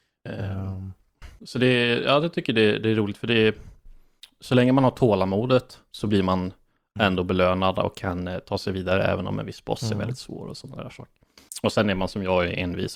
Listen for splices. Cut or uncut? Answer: uncut